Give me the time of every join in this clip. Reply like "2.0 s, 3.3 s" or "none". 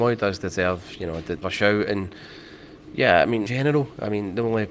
1.4 s, 3.5 s